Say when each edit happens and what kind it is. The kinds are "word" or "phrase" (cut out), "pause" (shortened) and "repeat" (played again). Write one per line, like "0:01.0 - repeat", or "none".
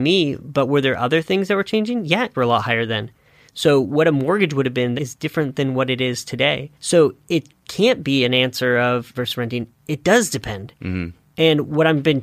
0:02.3 - phrase
0:05.0 - word
0:06.7 - pause
0:09.1 - phrase